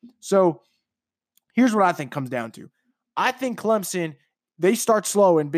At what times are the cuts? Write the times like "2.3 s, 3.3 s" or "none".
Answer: none